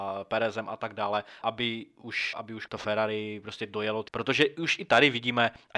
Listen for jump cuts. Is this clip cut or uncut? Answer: cut